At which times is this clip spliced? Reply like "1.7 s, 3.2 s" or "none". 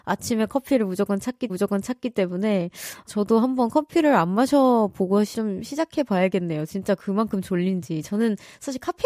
1.5 s, 3.1 s, 5.3 s